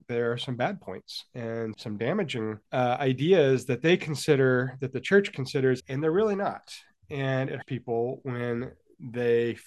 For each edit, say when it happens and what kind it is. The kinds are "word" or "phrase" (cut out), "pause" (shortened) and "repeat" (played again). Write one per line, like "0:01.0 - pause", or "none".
0:01.7 - word
0:02.7 - pause
0:05.8 - word
0:07.6 - word